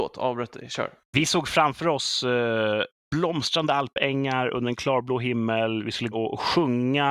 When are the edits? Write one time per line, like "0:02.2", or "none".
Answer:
0:06.1

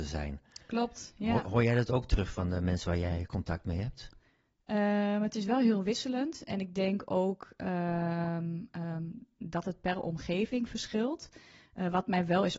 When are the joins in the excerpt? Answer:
none

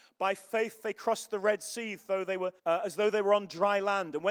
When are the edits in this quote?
0:02.6

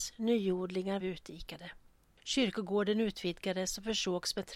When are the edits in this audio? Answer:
0:01.0

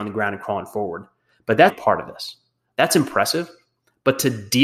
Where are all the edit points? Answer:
0:01.7

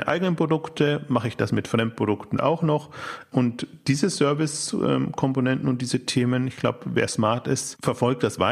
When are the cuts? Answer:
none

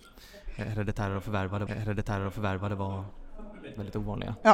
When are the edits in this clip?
0:01.7

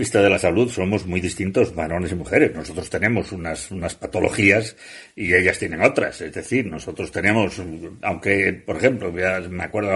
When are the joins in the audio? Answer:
none

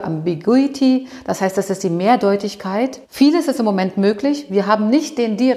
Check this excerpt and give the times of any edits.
0:03.0

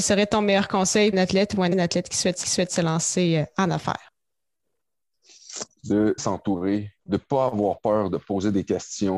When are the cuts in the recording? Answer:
0:01.1
0:01.7
0:02.4
0:06.2
0:07.0

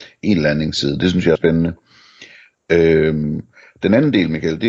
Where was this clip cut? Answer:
0:01.3

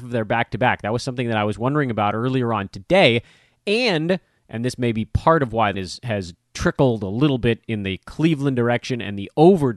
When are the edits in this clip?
0:05.7

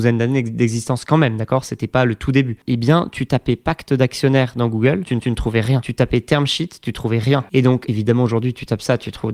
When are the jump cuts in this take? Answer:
0:05.2

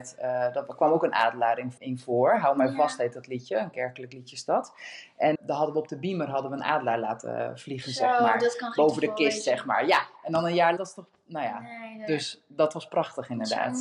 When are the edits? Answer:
0:01.8
0:05.3
0:10.8

